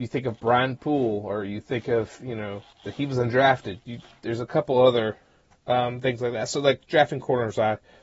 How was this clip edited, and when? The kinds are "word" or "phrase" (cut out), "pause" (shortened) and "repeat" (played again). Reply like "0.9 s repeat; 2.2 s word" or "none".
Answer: 2.7 s pause